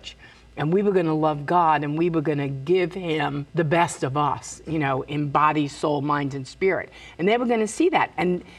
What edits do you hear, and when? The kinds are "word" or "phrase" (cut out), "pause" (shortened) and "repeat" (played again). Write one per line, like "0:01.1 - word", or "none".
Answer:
0:03.5 - pause